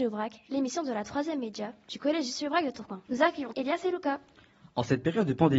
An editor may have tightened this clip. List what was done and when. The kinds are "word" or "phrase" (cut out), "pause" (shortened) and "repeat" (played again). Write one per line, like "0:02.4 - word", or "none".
0:03.1 - pause
0:03.5 - word